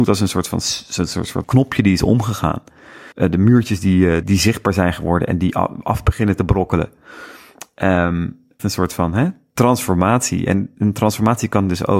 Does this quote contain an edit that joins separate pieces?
yes; 4 cuts; at 1.4 s, 3.1 s, 4.2 s, 8.6 s

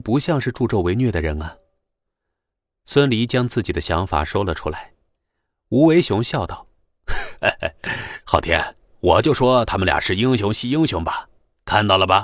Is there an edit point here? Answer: no; 0 cuts

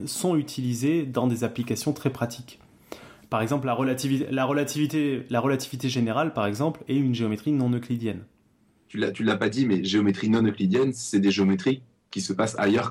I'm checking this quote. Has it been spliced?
no; 0 cuts

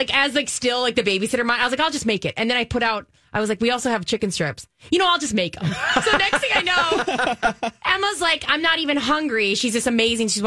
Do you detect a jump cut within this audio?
no; 0 cuts

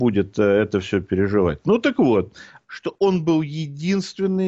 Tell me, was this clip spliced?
yes; 1 cut; at 2.6 s

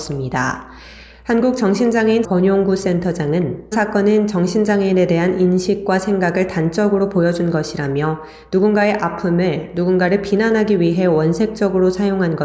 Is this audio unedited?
no; 2 cuts; at 2.2 s, 3.7 s

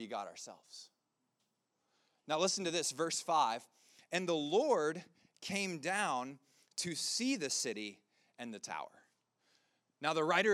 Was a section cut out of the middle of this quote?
no; 0 cuts

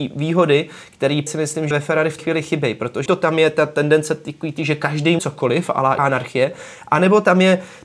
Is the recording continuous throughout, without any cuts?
no; 7 cuts; at 1.3 s, 1.7 s, 2.2 s, 3.1 s, 4.6 s, 5.2 s, 6.0 s

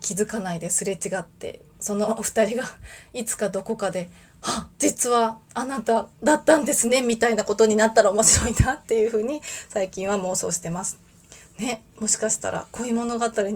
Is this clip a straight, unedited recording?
no; 2 cuts; at 4.7 s, 6.1 s

